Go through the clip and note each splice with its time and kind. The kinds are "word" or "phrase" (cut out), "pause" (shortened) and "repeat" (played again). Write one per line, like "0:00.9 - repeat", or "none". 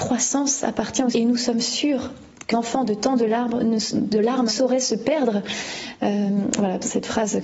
0:01.1 - word
0:02.5 - word
0:04.5 - word